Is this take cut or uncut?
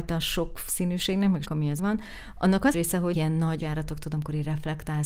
cut